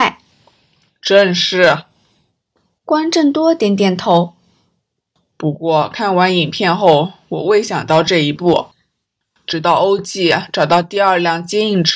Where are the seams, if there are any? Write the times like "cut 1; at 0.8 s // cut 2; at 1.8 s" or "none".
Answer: none